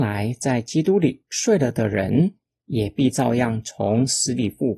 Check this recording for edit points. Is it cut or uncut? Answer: uncut